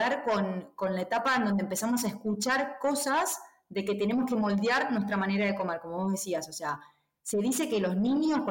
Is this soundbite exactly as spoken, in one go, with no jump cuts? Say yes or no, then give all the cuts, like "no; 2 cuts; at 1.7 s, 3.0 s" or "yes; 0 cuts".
yes; 0 cuts